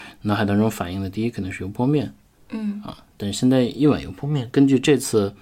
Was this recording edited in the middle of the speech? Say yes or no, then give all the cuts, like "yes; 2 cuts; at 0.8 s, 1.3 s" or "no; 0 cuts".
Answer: no; 0 cuts